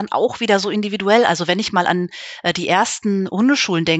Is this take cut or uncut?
uncut